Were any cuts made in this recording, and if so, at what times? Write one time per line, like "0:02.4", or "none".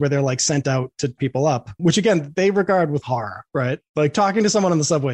0:01.2
0:01.8
0:02.3
0:03.0